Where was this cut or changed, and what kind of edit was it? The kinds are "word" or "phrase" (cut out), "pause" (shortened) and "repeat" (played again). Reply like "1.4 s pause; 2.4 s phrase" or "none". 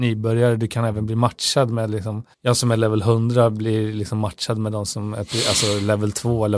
2.3 s pause